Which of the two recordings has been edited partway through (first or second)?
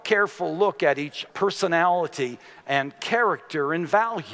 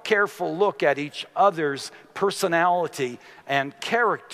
first